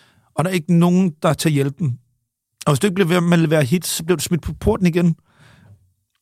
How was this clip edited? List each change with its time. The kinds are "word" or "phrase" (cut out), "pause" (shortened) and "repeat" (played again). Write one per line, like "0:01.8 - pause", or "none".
none